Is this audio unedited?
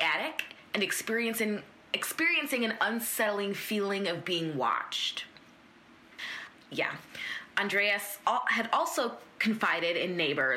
yes; 0 cuts

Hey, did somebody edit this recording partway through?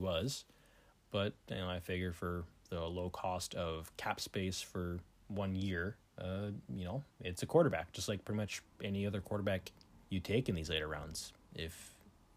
yes; 4 cuts; at 6.1 s, 7.1 s, 8.7 s, 10.0 s

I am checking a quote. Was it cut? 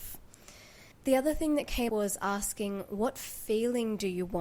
yes; 2 cuts; at 0.9 s, 1.9 s

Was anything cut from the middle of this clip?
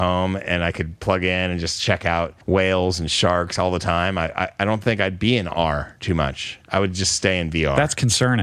yes; 2 cuts; at 2.4 s, 6.6 s

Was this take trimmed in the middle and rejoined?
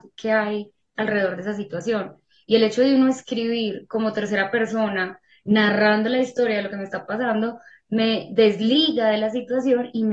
no; 0 cuts

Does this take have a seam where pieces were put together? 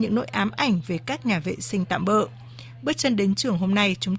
no; 0 cuts

